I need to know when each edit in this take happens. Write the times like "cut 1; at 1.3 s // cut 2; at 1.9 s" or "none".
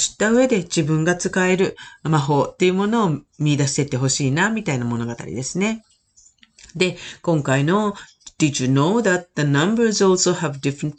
none